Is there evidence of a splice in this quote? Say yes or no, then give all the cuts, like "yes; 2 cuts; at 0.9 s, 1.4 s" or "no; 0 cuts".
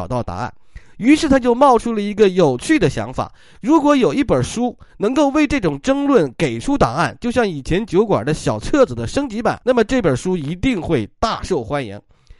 yes; 1 cut; at 9.6 s